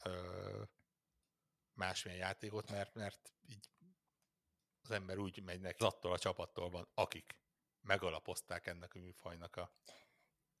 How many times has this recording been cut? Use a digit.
1